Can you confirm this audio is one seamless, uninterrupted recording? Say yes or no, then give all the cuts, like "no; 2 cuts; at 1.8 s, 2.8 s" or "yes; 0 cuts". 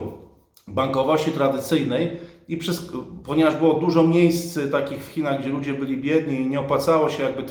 yes; 0 cuts